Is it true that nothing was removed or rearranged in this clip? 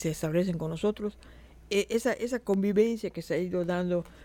yes; 0 cuts

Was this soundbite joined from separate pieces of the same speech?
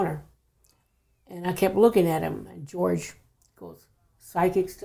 no; 0 cuts

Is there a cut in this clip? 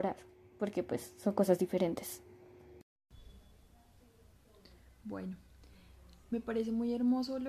no; 0 cuts

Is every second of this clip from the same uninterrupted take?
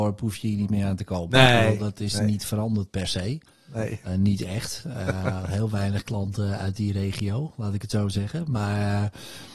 yes; 0 cuts

